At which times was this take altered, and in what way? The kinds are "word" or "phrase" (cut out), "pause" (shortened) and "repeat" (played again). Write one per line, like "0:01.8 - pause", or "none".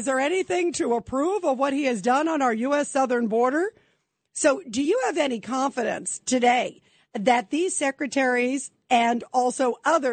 none